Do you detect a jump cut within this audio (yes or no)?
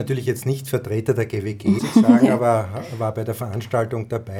yes